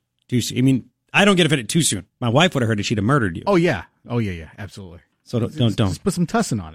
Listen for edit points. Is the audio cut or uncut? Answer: cut